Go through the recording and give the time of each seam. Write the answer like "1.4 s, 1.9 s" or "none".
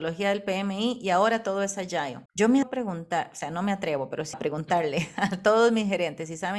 2.3 s, 2.6 s, 4.3 s